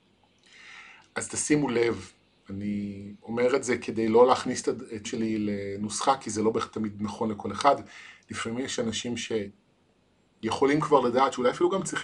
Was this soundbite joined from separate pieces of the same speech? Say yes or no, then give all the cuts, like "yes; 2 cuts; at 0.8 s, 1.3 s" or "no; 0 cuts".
yes; 2 cuts; at 3.2 s, 5.1 s